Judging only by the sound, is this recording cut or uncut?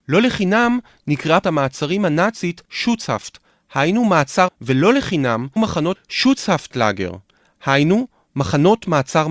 cut